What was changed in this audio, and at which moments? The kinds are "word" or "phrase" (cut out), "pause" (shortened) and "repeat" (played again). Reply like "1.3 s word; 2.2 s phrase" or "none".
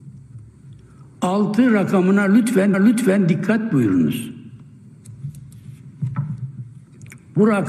2.7 s repeat